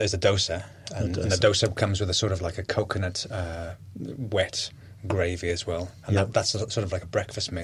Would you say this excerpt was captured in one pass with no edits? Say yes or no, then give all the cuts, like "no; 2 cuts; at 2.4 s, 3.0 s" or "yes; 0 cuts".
yes; 0 cuts